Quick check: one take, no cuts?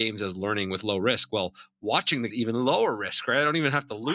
no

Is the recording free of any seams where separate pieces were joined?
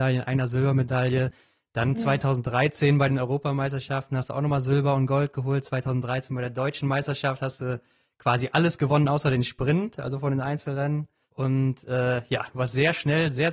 yes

